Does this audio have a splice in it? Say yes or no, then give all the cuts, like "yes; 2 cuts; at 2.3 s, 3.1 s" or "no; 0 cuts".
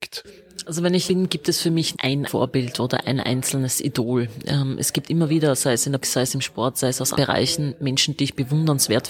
yes; 5 cuts; at 1.1 s, 1.9 s, 2.3 s, 6.0 s, 7.1 s